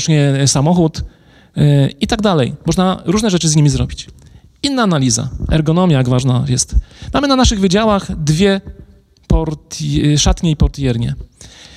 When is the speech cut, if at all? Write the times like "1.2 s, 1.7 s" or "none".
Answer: none